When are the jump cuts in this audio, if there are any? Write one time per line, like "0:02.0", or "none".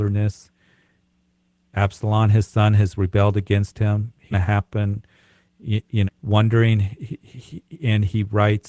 0:04.3
0:06.0